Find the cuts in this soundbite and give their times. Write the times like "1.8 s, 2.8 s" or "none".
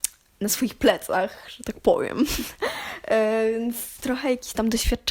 none